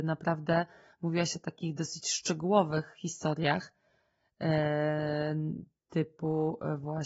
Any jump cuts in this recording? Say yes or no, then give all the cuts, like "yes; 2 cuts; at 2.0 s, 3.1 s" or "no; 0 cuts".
no; 0 cuts